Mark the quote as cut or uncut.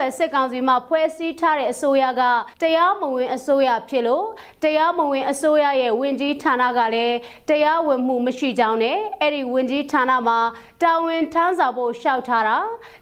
cut